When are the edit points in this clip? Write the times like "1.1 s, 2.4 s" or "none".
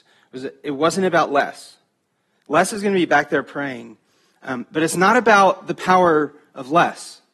none